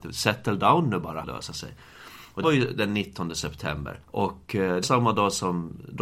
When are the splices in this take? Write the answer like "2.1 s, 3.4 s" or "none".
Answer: 1.2 s, 2.4 s, 4.0 s, 4.8 s